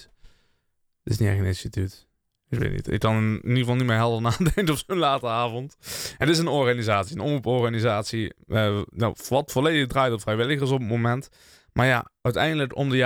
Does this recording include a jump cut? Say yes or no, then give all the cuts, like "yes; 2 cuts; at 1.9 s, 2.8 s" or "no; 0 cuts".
no; 0 cuts